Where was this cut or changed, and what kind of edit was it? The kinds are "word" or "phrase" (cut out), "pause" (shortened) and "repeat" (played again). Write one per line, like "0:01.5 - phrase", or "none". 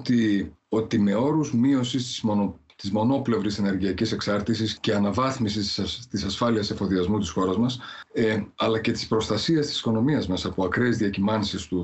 0:04.8 - word

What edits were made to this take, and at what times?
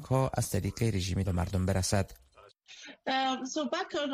0:01.2 - word

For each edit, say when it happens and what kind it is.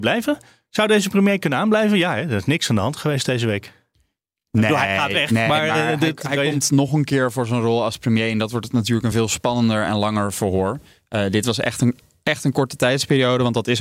none

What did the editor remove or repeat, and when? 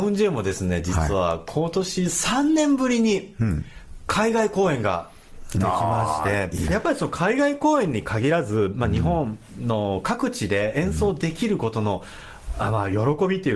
0:06.7 - word

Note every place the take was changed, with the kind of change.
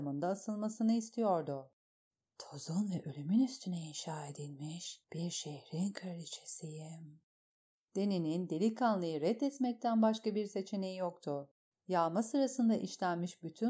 none

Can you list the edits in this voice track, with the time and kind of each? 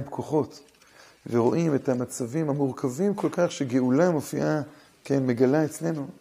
none

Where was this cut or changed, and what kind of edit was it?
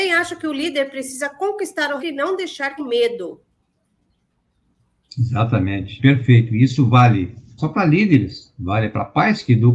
0:02.0 - word
0:02.8 - word
0:06.0 - word
0:07.6 - word

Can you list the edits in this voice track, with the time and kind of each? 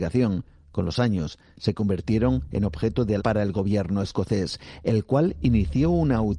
0:03.2 - word

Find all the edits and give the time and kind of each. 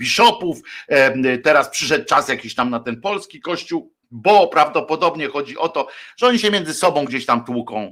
0:04.0 - pause

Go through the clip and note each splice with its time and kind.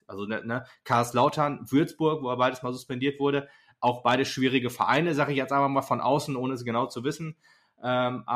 none

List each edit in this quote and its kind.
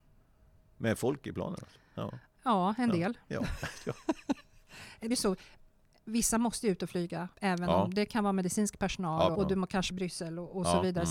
0:05.1 - word
0:07.3 - pause
0:09.3 - word
0:09.9 - phrase

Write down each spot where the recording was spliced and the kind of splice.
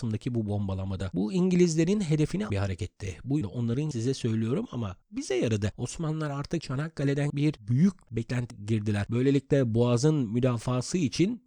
0:02.5 - phrase
0:03.4 - word
0:03.9 - phrase
0:05.0 - pause
0:07.3 - word
0:08.1 - word
0:08.5 - word

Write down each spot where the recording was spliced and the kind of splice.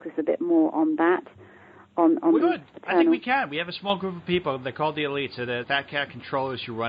0:02.4 - word
0:05.6 - word

